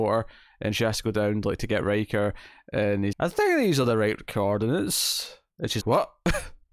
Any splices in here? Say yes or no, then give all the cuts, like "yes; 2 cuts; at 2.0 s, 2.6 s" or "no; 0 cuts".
yes; 2 cuts; at 3.1 s, 5.8 s